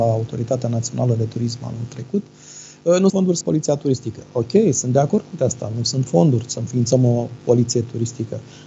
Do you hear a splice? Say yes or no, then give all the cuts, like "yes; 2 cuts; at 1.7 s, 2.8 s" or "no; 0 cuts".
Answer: yes; 3 cuts; at 3.1 s, 3.4 s, 5.4 s